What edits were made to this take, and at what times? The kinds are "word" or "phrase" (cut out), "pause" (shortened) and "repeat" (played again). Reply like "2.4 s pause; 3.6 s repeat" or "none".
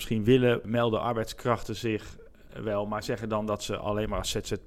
none